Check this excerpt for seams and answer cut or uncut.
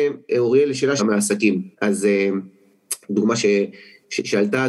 cut